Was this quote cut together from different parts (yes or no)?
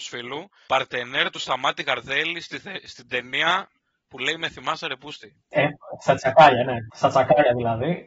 no